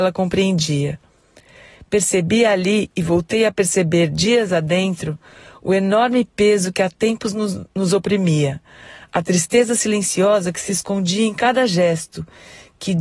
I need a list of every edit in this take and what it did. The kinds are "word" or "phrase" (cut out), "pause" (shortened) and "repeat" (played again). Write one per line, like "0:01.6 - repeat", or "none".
none